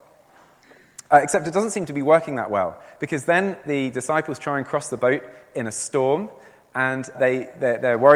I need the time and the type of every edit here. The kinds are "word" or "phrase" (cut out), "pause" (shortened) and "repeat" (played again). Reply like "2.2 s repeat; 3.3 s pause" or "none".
1.1 s pause; 7.1 s word